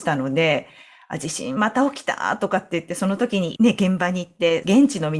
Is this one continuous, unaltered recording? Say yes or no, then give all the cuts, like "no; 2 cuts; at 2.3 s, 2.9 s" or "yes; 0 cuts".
yes; 0 cuts